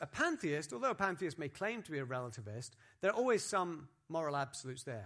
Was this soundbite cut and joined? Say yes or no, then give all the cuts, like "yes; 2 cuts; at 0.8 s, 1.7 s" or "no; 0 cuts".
no; 0 cuts